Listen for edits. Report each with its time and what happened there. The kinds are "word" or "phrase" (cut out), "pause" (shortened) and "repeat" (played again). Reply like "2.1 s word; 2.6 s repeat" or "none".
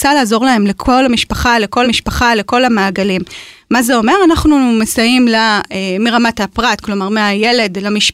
1.8 s repeat